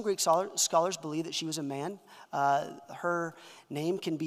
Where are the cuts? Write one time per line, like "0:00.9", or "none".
none